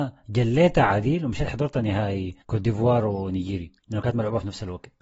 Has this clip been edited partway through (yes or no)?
yes